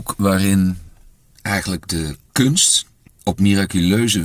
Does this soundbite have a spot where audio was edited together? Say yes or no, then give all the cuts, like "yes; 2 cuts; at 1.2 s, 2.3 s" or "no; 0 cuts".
yes; 2 cuts; at 1.1 s, 3.1 s